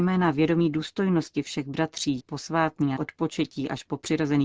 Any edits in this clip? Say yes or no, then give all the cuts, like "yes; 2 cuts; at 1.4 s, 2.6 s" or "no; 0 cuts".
yes; 2 cuts; at 2.2 s, 3.0 s